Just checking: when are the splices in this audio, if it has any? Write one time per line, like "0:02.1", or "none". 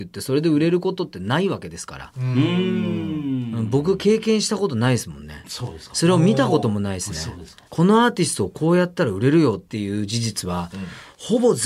0:07.7